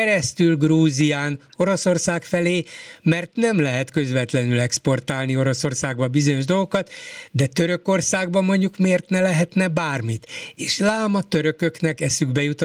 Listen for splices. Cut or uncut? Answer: uncut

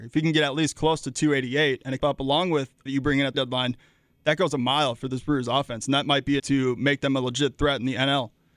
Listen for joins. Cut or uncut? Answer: cut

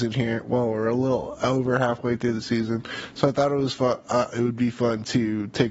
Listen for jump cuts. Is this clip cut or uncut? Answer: uncut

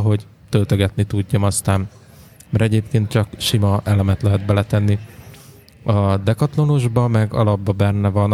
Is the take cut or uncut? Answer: uncut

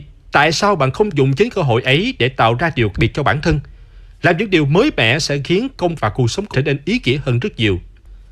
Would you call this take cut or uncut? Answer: cut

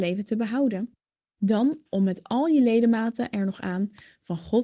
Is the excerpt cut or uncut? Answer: uncut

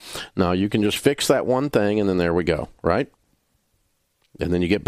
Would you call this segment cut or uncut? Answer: uncut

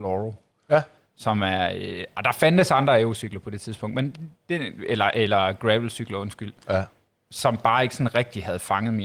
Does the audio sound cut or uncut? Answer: uncut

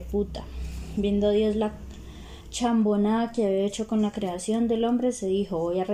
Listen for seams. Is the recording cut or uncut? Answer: uncut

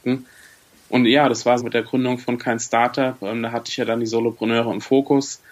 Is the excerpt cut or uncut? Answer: cut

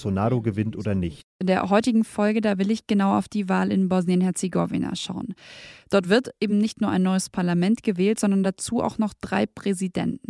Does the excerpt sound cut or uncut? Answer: uncut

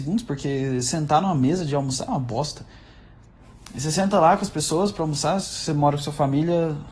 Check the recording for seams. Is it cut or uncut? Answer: uncut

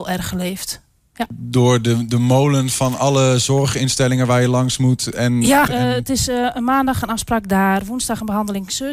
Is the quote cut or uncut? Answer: cut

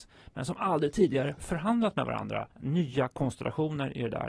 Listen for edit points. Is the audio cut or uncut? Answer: cut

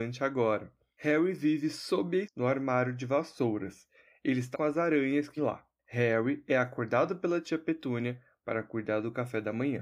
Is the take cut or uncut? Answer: cut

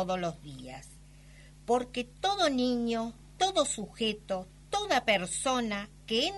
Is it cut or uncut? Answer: uncut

